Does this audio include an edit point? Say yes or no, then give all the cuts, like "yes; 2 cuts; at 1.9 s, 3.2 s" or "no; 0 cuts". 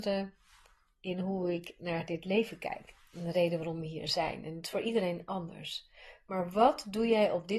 no; 0 cuts